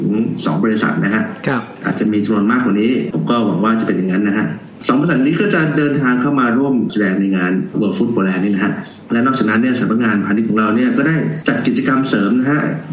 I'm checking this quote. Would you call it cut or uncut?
uncut